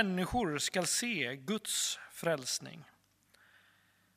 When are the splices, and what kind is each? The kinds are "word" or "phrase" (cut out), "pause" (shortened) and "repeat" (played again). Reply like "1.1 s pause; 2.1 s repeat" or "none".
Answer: none